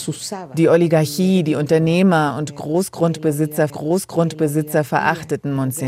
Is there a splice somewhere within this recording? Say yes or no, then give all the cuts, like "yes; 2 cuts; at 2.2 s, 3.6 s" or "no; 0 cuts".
yes; 1 cut; at 3.7 s